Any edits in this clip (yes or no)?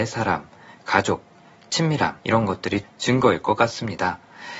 yes